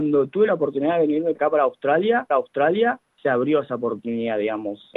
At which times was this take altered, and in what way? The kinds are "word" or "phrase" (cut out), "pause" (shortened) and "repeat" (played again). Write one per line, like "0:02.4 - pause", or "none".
0:01.3 - word
0:02.3 - repeat